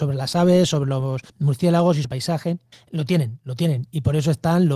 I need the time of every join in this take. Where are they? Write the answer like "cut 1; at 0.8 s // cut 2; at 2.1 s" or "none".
cut 1; at 1.3 s // cut 2; at 2.0 s // cut 3; at 2.7 s